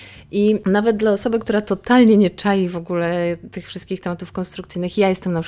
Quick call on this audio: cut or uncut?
uncut